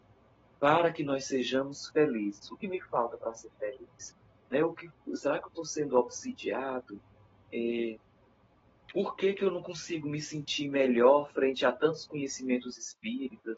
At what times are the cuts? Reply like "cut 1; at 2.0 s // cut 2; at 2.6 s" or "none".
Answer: none